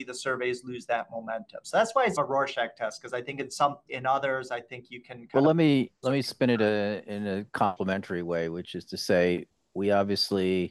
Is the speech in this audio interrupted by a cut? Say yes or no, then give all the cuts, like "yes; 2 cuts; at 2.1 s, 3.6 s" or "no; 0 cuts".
yes; 3 cuts; at 2.2 s, 3.9 s, 6.0 s